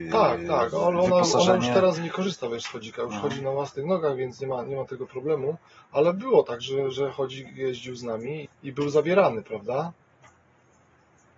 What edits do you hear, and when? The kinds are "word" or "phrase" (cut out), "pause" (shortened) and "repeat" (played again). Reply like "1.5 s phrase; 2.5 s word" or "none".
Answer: 2.0 s word; 8.4 s word